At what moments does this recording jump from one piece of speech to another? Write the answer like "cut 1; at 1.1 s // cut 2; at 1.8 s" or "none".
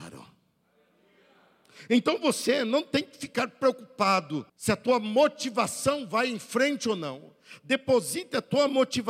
cut 1; at 4.5 s